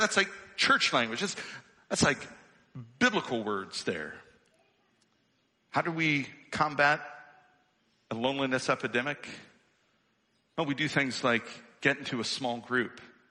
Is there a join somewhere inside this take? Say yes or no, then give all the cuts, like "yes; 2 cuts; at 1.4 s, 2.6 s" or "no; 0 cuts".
no; 0 cuts